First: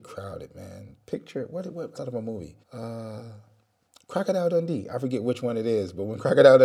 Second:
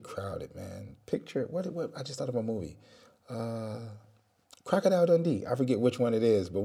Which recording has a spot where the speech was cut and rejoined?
first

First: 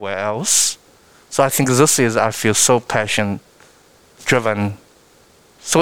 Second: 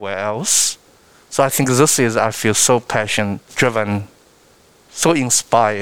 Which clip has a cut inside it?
second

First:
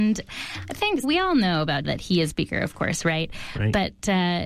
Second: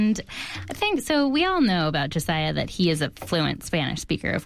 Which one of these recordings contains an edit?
first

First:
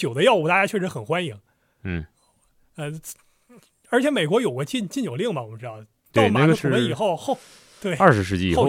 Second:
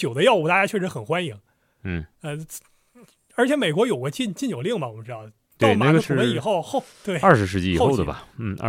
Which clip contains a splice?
second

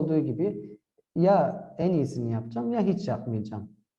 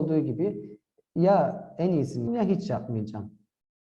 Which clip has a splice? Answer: second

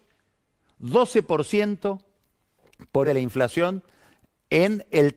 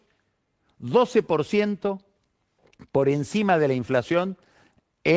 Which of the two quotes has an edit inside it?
first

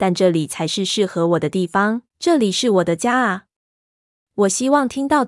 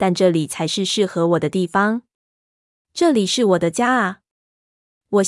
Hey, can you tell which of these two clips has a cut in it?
first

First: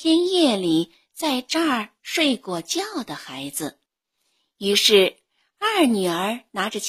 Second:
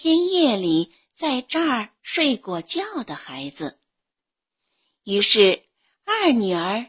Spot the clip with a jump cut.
first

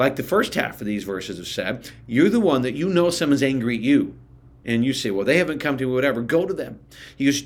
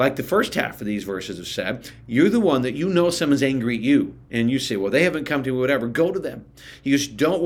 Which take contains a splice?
second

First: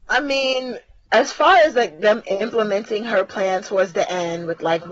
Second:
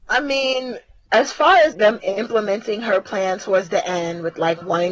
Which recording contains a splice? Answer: second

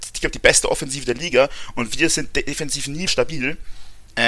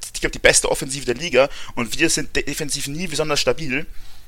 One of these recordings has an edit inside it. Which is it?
first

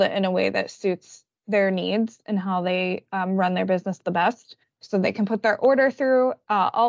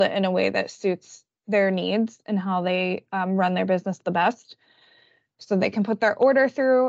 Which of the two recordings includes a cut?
first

